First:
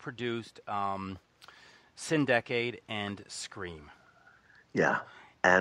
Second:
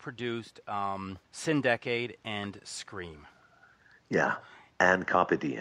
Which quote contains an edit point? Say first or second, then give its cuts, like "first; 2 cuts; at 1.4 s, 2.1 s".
second; 1 cut; at 1.3 s